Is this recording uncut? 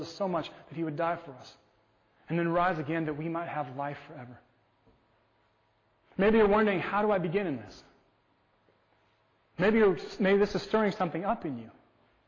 yes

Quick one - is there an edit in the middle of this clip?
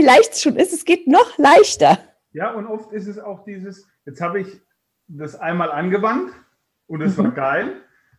no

